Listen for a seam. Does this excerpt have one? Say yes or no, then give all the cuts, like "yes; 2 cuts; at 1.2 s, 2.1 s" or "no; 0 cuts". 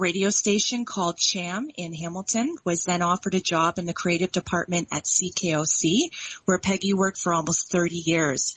no; 0 cuts